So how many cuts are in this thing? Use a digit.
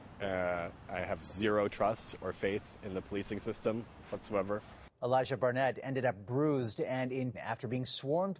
2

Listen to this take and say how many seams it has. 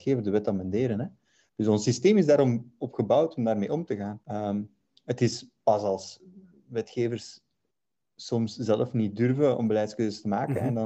1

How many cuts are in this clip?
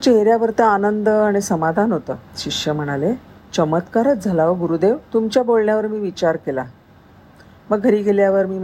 3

